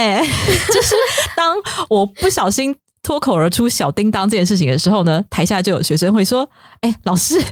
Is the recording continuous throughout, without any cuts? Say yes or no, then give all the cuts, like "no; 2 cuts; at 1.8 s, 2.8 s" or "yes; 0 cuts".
yes; 0 cuts